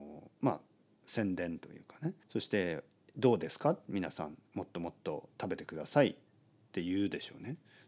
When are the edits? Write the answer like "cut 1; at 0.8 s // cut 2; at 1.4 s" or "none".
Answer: cut 1; at 2.2 s